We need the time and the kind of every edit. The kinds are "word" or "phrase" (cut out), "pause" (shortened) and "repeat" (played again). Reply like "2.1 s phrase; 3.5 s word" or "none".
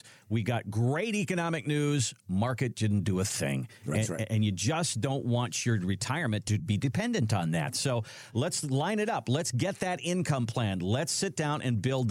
none